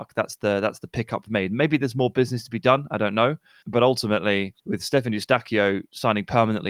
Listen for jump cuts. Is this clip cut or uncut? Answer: cut